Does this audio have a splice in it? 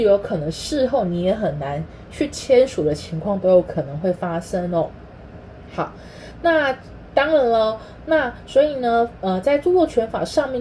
no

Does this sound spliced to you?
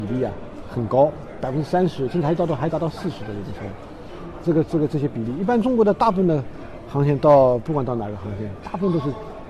yes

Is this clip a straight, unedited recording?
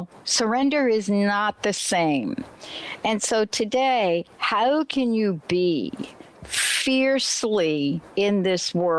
yes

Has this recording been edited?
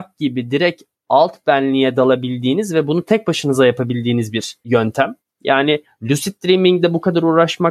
no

